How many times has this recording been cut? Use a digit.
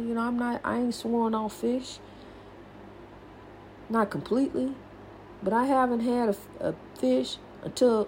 0